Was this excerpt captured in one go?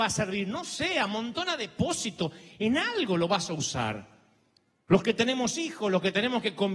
yes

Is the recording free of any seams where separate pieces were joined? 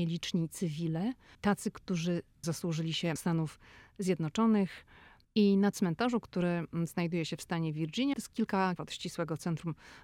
no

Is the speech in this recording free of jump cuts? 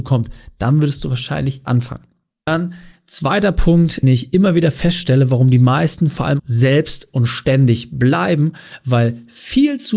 no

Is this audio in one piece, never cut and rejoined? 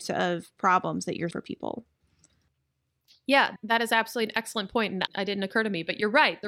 no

